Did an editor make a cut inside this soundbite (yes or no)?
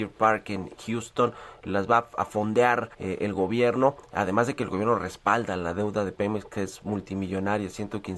yes